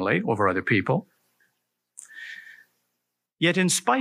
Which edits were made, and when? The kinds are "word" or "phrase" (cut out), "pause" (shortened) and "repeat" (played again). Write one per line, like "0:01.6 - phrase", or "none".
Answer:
none